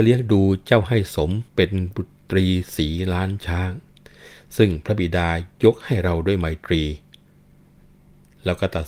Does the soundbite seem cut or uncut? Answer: cut